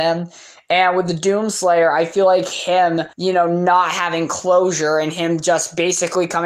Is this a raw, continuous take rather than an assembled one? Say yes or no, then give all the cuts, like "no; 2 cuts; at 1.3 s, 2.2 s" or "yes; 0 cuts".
no; 1 cut; at 3.1 s